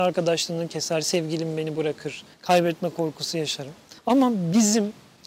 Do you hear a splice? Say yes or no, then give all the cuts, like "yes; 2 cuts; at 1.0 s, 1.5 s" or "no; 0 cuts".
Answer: yes; 2 cuts; at 2.3 s, 4.0 s